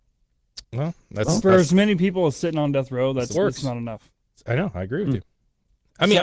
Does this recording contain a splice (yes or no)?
yes